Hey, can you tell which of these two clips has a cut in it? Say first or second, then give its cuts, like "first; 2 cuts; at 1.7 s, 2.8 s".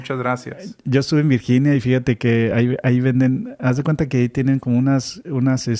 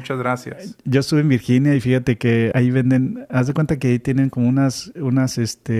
second; 1 cut; at 2.5 s